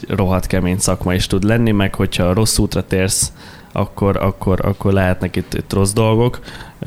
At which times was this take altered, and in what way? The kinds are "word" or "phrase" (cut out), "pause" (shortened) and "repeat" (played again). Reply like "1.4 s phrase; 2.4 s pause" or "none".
none